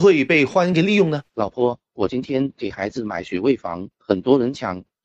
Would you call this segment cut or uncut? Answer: cut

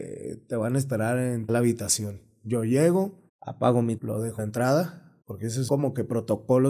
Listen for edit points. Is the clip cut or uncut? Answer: cut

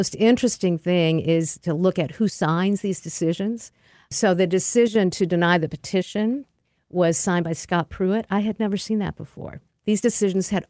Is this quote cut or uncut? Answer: uncut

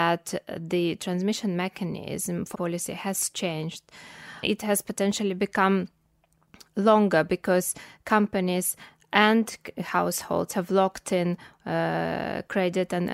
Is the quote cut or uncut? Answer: cut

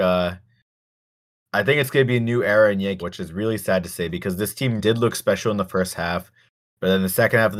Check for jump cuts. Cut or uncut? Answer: cut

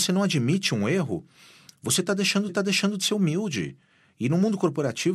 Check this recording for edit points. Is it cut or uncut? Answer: cut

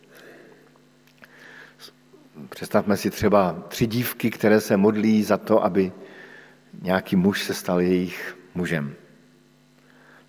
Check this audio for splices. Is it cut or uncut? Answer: uncut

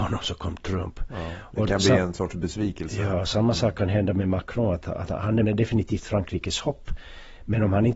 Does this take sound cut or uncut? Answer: cut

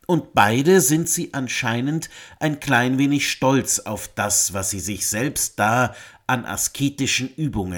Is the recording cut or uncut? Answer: uncut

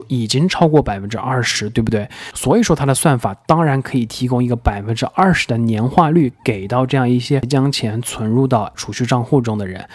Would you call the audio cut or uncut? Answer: cut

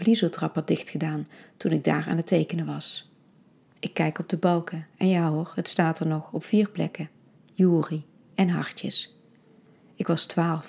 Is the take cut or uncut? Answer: uncut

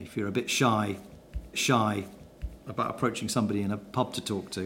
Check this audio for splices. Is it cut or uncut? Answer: cut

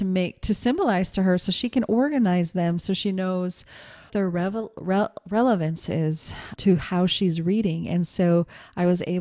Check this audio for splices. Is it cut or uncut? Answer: cut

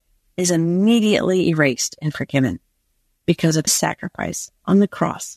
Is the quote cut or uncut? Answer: cut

